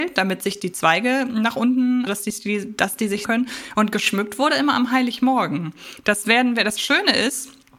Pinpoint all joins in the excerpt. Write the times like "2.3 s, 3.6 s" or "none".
2.1 s, 3.2 s

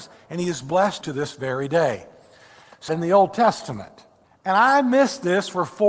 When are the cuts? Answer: 1.0 s, 2.9 s, 4.2 s

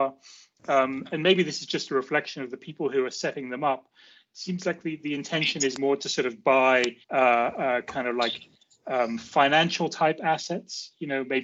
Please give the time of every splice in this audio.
7.0 s

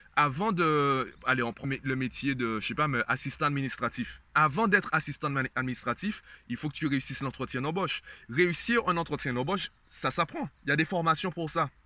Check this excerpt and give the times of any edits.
1.6 s

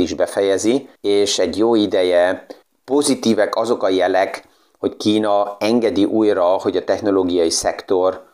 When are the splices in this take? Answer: 0.9 s, 2.6 s

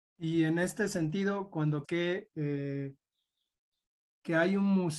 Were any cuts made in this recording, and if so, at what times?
1.8 s

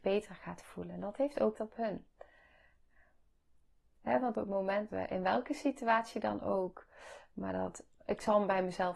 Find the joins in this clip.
1.5 s, 4.3 s, 4.9 s

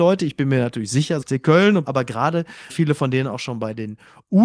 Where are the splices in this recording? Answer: 1.2 s, 1.8 s, 2.7 s

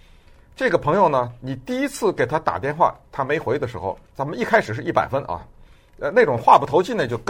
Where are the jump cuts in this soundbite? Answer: 4.0 s

